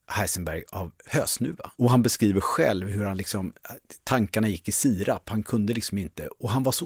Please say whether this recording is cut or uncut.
cut